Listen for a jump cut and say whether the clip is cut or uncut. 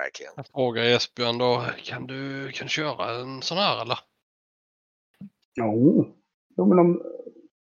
uncut